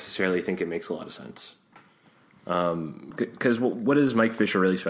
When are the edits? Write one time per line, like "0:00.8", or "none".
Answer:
none